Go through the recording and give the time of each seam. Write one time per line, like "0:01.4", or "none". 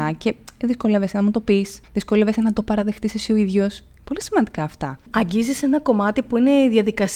0:01.8

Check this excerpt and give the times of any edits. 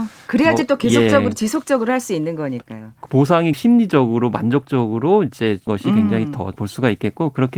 0:03.5
0:05.7
0:06.5

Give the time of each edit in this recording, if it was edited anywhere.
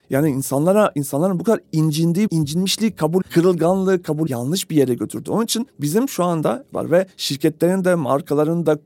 0:02.3
0:03.2
0:04.3
0:06.7

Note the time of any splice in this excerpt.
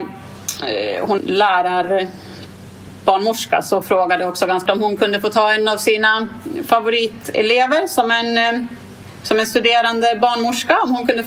0:01.2
0:03.8
0:04.7

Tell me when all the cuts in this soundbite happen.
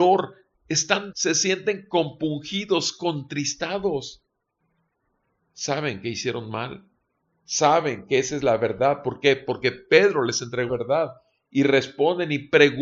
0:01.1
0:10.7

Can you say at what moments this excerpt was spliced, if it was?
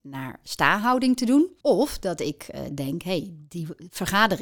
0:01.6

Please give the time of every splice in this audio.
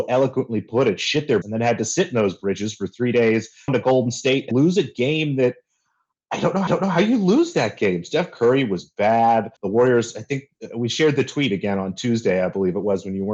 0:01.4
0:03.7
0:04.5
0:06.7
0:09.6

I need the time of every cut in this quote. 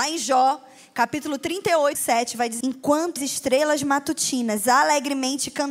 0:01.9
0:02.6
0:03.2

